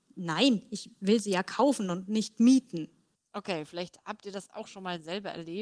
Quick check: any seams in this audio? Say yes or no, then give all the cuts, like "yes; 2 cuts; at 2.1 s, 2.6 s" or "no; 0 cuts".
no; 0 cuts